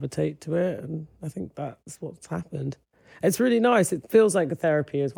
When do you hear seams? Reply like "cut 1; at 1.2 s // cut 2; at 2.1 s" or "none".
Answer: none